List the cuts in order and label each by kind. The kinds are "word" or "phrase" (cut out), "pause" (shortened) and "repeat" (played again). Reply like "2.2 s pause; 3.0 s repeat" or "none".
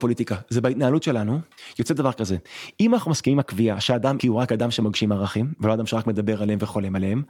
4.2 s word